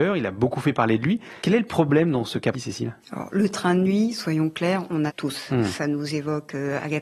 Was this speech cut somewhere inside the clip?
yes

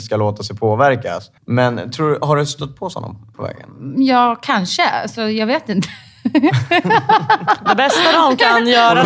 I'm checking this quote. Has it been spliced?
yes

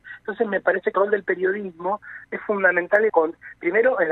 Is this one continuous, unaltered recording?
no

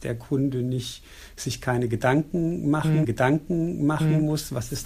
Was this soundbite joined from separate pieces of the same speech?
yes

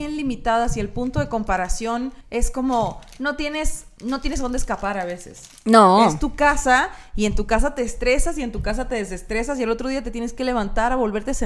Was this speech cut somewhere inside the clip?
yes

